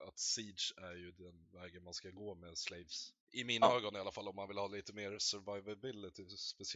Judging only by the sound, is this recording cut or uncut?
cut